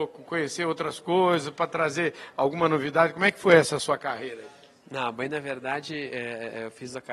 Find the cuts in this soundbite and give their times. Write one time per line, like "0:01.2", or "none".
none

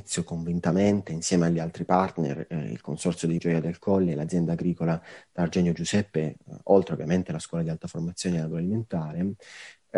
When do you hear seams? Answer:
0:03.4

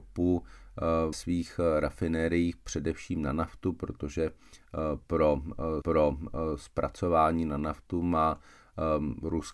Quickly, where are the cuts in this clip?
0:01.1
0:05.8

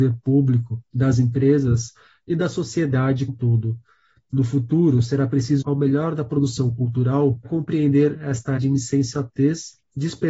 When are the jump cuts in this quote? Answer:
0:03.3
0:05.6
0:07.4
0:08.6

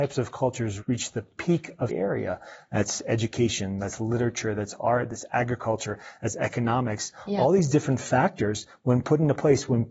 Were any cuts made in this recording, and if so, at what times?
0:01.9

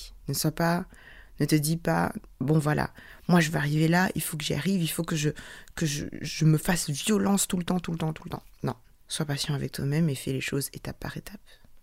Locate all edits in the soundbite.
0:02.3
0:08.8

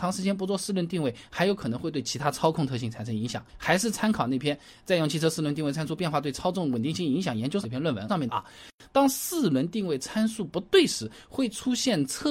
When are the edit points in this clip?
0:03.5

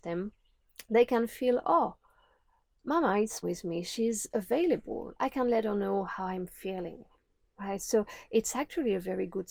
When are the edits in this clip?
0:03.4

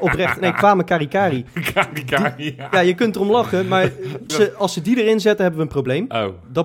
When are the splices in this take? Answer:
0:04.3

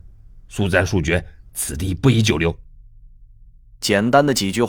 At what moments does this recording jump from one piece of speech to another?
none

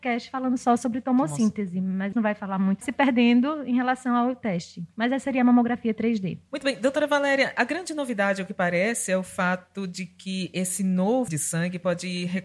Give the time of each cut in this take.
0:02.1
0:02.8
0:06.5
0:11.3

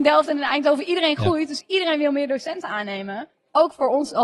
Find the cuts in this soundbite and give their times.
none

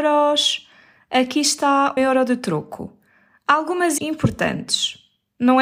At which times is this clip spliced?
0:02.0
0:04.0

